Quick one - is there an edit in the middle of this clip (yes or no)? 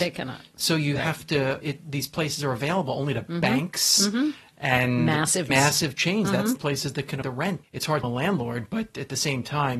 yes